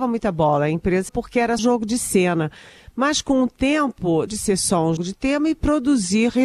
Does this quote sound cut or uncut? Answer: cut